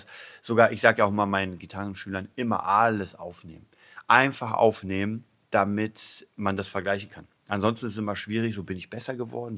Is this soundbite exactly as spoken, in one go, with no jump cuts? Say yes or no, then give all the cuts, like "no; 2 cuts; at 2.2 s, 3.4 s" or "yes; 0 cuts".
yes; 0 cuts